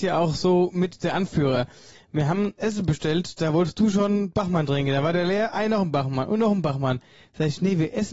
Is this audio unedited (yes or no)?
no